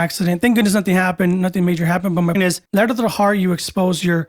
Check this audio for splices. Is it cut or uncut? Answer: cut